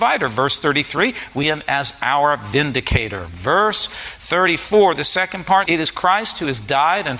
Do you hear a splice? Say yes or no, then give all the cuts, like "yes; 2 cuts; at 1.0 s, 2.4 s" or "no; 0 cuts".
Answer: yes; 2 cuts; at 1.4 s, 5.6 s